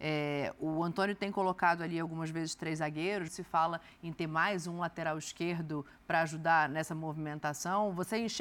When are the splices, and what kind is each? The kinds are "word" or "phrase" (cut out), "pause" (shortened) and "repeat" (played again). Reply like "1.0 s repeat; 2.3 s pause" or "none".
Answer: 3.3 s word